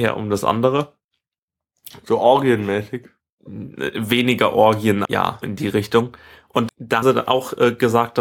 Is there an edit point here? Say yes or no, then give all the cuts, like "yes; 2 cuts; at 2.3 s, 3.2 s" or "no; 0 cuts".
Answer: yes; 4 cuts; at 5.0 s, 5.4 s, 6.7 s, 7.0 s